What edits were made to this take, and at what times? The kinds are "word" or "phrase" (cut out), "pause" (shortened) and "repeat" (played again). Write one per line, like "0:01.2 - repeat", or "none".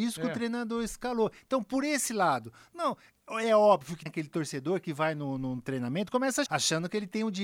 0:04.1 - word
0:06.5 - word